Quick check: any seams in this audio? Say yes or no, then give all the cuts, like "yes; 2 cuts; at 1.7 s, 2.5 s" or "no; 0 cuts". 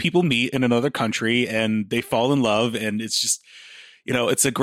no; 0 cuts